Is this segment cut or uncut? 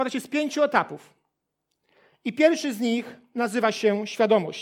uncut